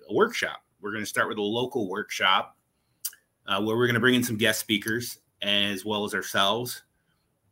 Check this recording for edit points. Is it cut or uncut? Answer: uncut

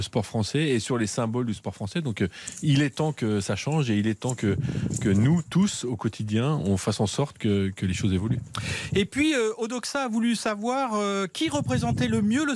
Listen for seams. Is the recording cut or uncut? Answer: uncut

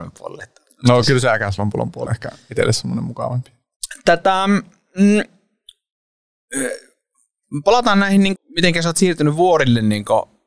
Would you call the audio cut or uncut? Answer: cut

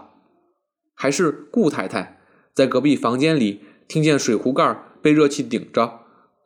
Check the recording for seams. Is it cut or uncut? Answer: uncut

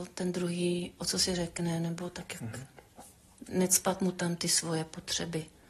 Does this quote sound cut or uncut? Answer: cut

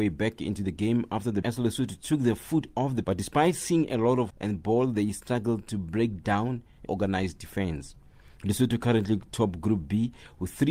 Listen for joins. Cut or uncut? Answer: cut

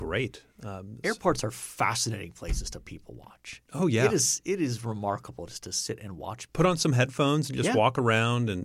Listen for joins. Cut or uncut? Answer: cut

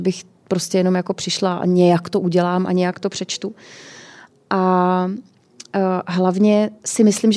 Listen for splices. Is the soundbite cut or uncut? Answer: uncut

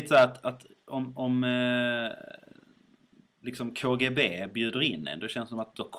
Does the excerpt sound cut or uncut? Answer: uncut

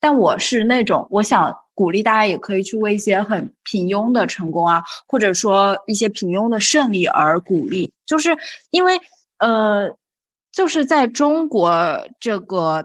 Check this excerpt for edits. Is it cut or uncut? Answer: uncut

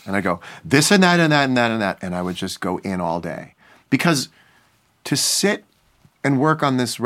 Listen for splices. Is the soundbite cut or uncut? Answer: uncut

